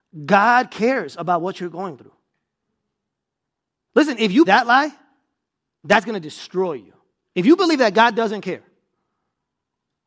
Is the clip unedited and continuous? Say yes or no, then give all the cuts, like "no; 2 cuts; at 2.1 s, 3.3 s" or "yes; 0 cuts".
no; 1 cut; at 4.5 s